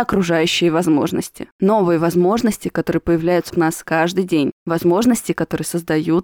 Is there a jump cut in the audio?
yes; 1 cut; at 3.5 s

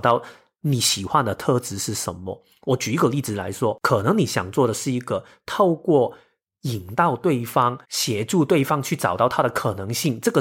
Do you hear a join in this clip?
yes; 1 cut; at 7.8 s

